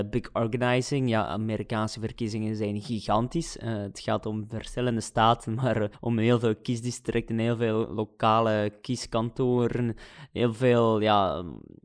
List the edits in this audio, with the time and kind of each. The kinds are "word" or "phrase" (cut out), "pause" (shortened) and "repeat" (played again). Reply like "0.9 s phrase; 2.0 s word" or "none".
5.9 s pause

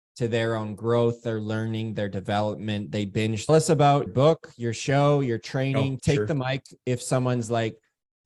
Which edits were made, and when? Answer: 3.5 s phrase; 4.1 s word; 6.0 s word

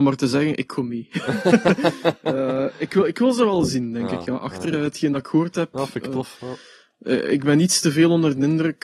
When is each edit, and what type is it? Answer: none

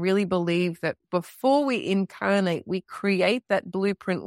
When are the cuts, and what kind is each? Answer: 1.0 s pause

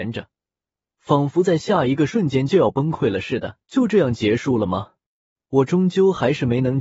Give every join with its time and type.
3.6 s pause

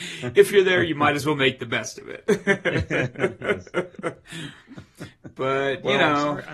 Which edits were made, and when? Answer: none

